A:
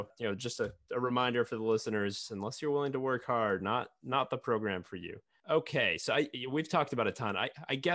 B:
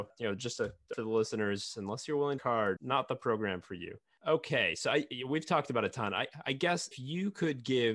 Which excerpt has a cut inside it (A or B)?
B